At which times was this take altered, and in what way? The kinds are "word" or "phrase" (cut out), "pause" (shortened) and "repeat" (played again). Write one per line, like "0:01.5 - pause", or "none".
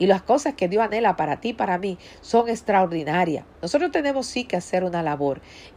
none